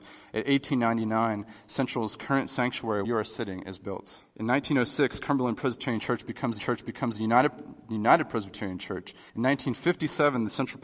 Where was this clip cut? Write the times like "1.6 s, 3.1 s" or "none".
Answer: 3.0 s, 4.3 s, 6.6 s, 9.3 s